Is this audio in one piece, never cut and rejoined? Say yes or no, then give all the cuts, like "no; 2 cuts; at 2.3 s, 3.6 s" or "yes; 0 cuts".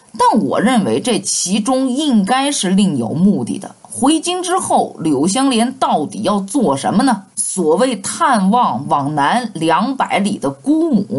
no; 1 cut; at 7.3 s